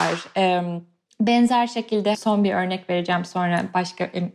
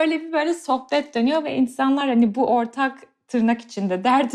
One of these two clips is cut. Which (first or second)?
first